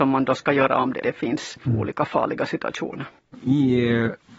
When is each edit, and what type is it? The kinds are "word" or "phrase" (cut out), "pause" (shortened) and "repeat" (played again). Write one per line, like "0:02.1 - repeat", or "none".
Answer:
0:01.0 - word

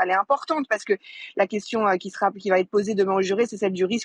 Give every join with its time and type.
none

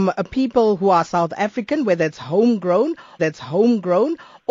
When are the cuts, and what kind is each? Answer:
0:03.2 - repeat

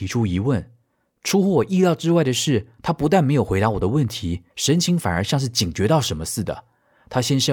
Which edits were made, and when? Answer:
0:04.5 - pause

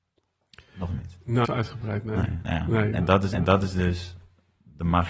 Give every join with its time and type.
0:01.4 - word
0:03.3 - repeat

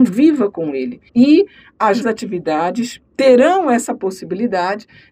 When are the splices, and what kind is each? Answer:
0:01.1 - pause
0:02.0 - word
0:03.1 - pause

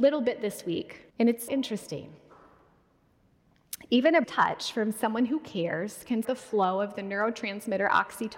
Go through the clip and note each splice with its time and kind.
0:01.1 - pause
0:01.5 - word
0:04.2 - word
0:06.2 - word

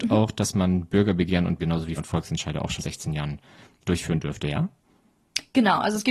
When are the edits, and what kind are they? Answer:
0:01.6 - word
0:02.0 - word
0:02.8 - word
0:03.8 - word

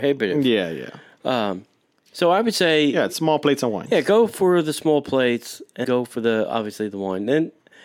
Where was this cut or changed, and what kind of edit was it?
0:05.8 - word

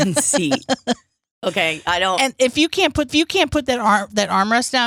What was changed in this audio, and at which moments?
0:03.1 - repeat

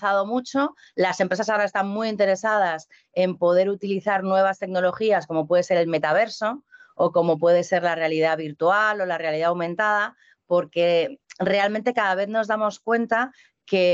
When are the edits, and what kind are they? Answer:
none

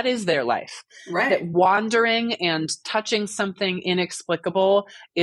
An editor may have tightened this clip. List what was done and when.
none

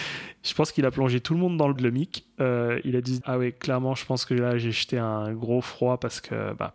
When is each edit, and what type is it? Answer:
0:01.8 - word
0:03.2 - word

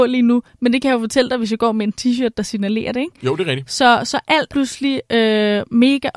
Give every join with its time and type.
0:04.5 - word

